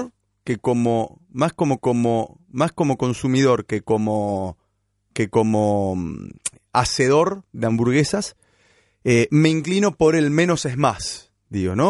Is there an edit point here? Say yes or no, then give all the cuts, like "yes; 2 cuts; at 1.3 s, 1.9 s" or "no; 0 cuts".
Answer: yes; 1 cut; at 1.8 s